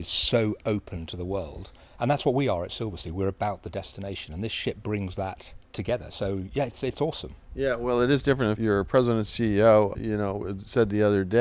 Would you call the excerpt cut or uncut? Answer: cut